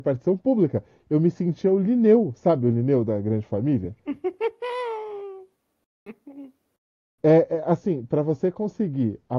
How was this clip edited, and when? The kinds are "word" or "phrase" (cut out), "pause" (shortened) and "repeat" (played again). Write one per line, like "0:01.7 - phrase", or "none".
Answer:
none